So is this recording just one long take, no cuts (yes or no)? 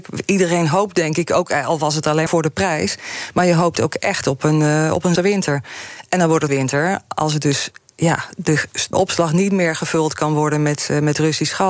no